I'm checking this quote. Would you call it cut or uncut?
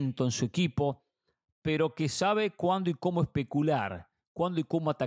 uncut